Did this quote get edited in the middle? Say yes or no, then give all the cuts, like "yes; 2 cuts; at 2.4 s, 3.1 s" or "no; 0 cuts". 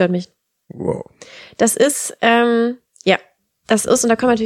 no; 0 cuts